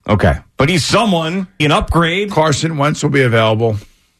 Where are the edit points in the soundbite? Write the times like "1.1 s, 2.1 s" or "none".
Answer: 1.6 s